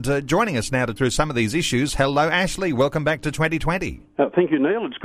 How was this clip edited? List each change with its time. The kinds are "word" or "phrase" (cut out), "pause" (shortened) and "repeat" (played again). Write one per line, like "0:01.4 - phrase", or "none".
0:01.0 - word